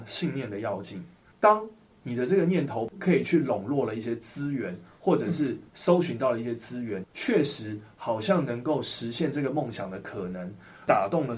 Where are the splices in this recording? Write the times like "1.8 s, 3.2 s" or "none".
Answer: 7.0 s